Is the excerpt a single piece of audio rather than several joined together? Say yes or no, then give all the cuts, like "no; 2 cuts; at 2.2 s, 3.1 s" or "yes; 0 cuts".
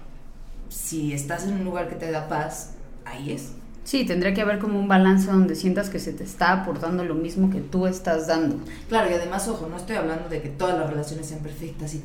yes; 0 cuts